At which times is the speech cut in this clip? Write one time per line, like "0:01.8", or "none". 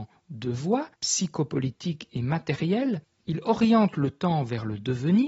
0:00.9